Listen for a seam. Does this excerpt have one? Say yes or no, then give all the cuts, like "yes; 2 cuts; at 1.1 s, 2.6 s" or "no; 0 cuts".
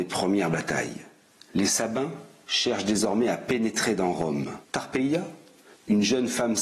yes; 1 cut; at 4.6 s